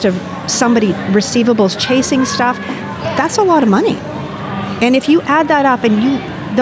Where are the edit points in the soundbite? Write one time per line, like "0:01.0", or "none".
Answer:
none